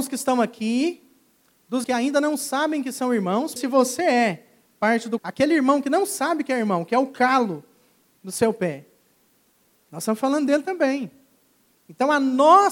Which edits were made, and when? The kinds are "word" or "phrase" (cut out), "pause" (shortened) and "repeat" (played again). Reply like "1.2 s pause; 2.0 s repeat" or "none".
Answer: 1.8 s word; 3.6 s word; 5.2 s word